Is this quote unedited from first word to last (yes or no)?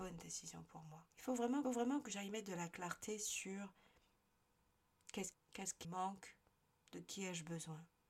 no